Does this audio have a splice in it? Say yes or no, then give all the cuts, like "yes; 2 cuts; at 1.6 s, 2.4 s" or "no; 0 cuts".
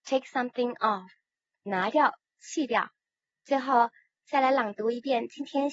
no; 0 cuts